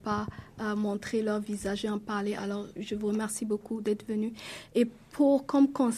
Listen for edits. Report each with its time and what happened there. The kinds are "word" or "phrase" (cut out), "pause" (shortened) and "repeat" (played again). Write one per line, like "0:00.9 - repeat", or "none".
0:02.8 - word